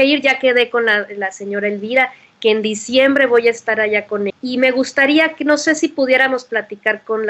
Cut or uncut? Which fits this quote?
cut